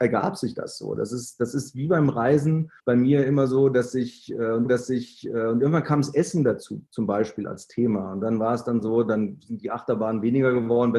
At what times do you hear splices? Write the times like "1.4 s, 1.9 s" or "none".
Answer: 2.8 s, 4.6 s, 6.9 s

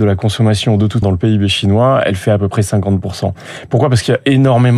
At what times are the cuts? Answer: 1.0 s

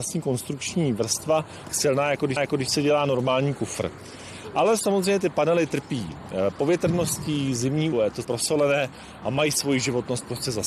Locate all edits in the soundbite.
1.7 s, 2.4 s, 7.9 s, 8.2 s

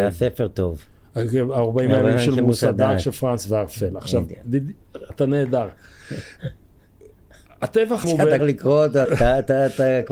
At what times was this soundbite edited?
5.1 s, 8.0 s, 8.4 s, 9.1 s

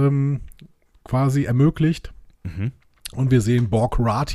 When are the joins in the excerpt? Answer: none

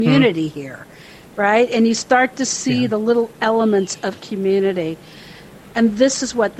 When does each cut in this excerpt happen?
none

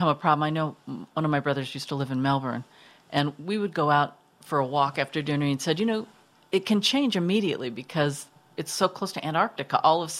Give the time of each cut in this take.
none

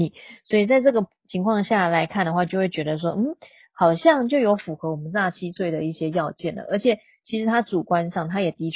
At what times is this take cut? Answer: none

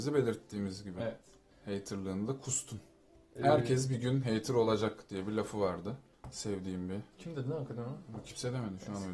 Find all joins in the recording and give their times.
1.5 s, 7.1 s

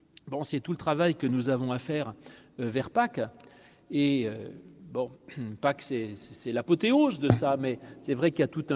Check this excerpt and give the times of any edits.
none

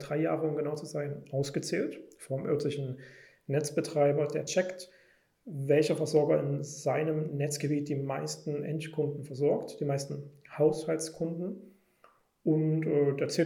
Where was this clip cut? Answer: none

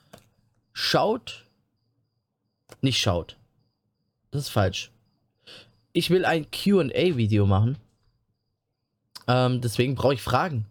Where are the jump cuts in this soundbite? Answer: none

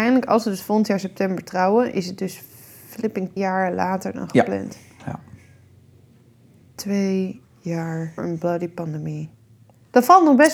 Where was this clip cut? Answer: 3.4 s, 8.2 s

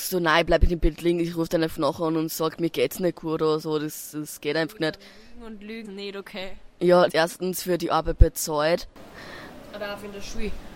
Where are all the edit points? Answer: 5.8 s, 7.1 s

